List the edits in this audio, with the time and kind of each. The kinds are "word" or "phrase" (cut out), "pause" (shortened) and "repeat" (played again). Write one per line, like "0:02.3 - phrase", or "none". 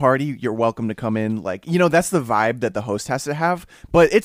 none